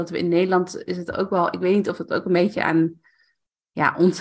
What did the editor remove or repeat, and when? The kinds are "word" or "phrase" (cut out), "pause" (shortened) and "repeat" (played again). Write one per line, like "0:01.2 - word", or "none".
none